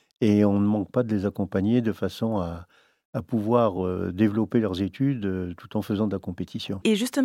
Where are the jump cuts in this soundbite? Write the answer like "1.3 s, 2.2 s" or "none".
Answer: none